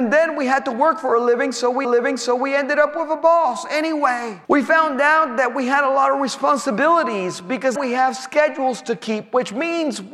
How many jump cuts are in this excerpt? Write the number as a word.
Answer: three